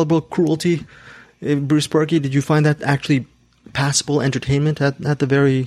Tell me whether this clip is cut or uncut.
uncut